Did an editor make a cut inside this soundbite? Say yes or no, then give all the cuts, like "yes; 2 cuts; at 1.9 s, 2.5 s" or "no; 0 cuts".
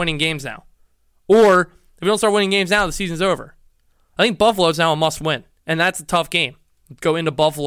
no; 0 cuts